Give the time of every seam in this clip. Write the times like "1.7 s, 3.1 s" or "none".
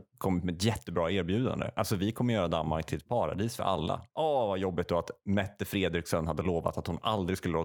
4.1 s